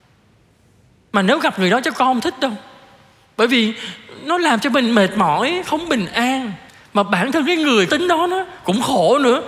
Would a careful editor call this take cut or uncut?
cut